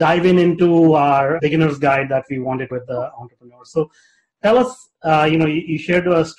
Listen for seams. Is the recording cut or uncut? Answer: cut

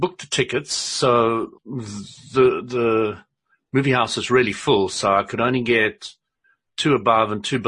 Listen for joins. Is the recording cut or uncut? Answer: cut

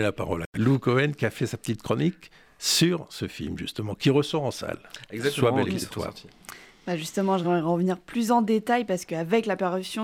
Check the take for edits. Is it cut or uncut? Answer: uncut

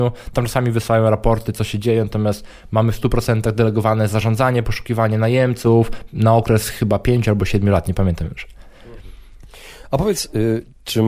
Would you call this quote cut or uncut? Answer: uncut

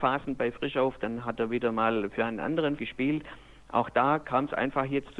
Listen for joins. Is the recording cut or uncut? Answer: cut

